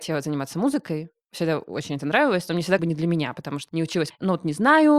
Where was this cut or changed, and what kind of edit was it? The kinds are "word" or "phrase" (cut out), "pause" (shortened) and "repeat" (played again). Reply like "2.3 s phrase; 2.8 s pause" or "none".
2.8 s phrase; 3.7 s word; 4.1 s phrase